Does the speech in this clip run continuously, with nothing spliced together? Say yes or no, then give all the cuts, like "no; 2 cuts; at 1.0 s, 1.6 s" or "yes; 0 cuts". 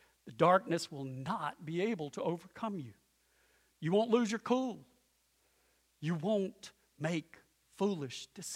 yes; 0 cuts